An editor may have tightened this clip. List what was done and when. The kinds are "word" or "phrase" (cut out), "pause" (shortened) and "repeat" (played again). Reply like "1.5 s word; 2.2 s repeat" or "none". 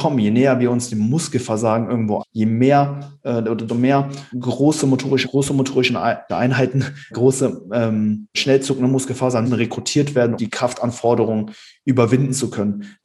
2.2 s word; 3.7 s word; 4.3 s word; 5.2 s word; 6.3 s word; 7.1 s word; 8.3 s word; 9.4 s word; 10.4 s word